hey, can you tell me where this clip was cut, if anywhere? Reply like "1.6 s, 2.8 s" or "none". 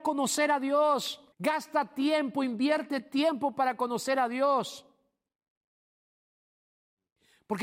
1.3 s